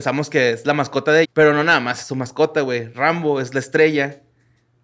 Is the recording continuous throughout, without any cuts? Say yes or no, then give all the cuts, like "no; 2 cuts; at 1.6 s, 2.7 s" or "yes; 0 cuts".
no; 1 cut; at 1.2 s